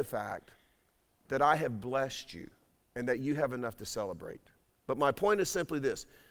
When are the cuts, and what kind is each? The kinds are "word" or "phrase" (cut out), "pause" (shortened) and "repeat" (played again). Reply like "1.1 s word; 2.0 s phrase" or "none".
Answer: 2.8 s pause; 4.6 s pause